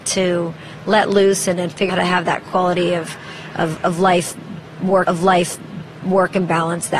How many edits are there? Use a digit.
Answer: 2